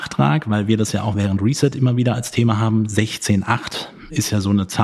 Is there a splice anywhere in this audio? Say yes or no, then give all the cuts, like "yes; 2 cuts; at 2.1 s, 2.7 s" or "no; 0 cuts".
no; 0 cuts